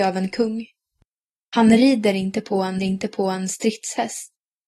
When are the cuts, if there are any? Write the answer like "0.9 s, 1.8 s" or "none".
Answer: 2.8 s